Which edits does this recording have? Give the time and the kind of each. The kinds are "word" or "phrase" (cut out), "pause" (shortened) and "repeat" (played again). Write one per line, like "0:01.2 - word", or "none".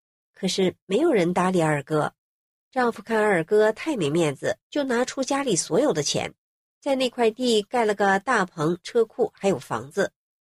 0:04.6 - pause